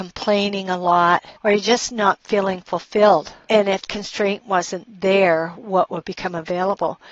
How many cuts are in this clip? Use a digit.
2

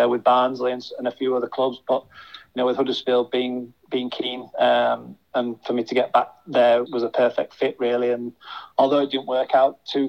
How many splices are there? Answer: 1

